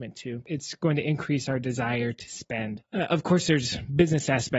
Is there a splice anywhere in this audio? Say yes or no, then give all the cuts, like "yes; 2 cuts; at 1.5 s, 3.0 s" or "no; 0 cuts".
no; 0 cuts